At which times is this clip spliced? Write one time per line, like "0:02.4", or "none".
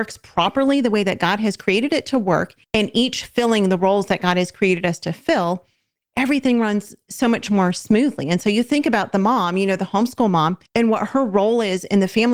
0:02.6
0:10.7